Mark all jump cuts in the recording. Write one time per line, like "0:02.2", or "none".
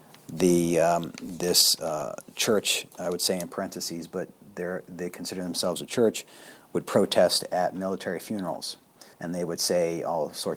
0:09.1